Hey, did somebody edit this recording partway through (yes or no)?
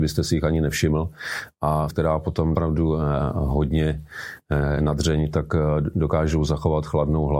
yes